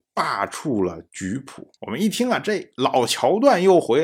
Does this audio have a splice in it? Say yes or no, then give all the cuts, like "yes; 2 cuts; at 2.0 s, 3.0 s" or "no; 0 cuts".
yes; 1 cut; at 1.8 s